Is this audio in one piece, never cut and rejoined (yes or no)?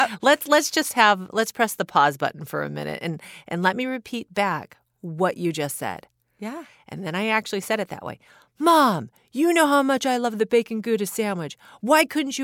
yes